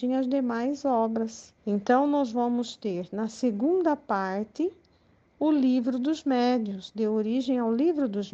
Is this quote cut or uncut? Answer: cut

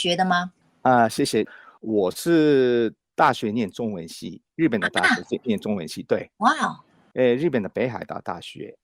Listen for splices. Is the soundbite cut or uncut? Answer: uncut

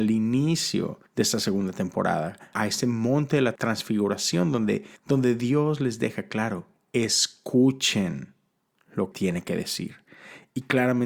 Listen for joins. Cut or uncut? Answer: cut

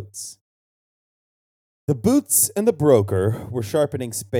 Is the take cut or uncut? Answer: uncut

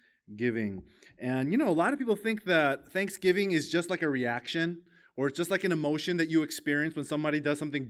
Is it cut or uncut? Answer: uncut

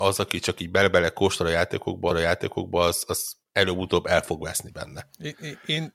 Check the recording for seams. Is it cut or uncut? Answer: cut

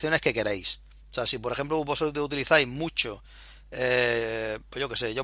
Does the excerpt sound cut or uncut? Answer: uncut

